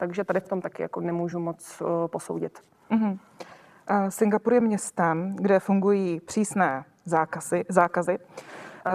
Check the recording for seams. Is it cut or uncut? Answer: uncut